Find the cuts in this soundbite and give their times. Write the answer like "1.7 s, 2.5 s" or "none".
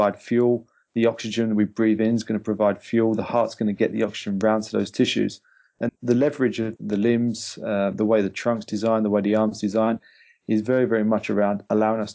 5.9 s